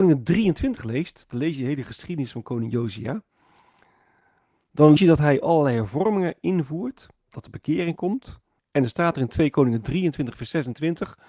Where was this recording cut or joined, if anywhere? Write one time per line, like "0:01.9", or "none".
0:05.0
0:07.2
0:08.6